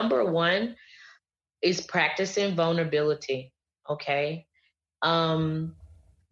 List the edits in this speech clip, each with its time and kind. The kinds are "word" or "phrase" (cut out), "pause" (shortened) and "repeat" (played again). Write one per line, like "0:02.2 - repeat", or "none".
none